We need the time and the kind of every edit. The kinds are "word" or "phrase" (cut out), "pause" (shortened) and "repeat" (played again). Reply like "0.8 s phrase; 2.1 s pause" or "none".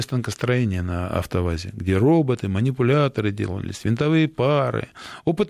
none

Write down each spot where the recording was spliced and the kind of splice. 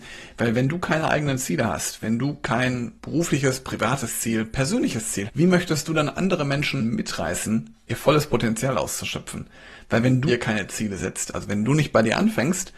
3.0 s pause; 5.3 s word; 6.8 s phrase; 10.3 s word

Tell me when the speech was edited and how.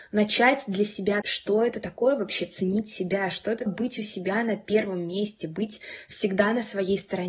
1.2 s word; 3.7 s word

